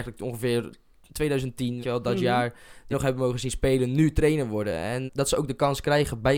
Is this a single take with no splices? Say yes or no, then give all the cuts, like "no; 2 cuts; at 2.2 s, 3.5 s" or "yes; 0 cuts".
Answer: no; 3 cuts; at 1.8 s, 2.9 s, 5.1 s